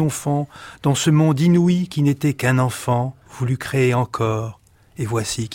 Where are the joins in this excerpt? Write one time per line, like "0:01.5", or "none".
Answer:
0:03.2